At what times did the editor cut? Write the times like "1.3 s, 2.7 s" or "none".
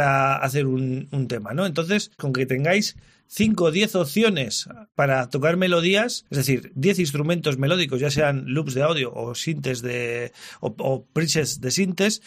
6.3 s